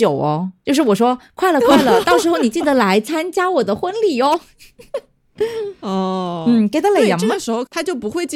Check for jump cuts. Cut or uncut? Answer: uncut